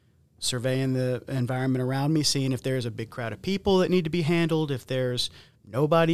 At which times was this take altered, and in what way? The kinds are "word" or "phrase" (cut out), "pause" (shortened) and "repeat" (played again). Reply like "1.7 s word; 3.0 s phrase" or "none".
none